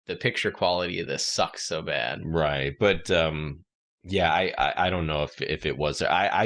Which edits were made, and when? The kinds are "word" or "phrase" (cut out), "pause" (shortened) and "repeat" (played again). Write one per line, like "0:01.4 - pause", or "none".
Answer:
none